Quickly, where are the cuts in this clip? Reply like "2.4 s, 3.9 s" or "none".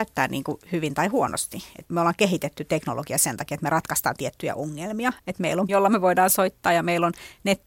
5.2 s, 5.7 s